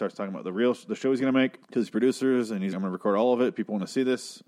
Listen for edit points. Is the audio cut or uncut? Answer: cut